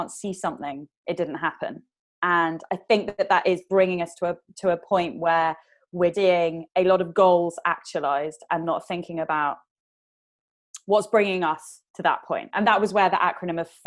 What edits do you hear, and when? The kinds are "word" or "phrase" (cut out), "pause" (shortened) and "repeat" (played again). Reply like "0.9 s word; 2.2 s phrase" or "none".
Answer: 1.0 s pause; 6.1 s word; 11.9 s pause